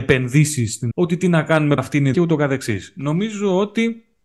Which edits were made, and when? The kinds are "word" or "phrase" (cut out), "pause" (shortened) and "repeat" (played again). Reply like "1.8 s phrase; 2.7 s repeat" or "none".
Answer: 0.9 s word; 1.8 s word; 2.1 s phrase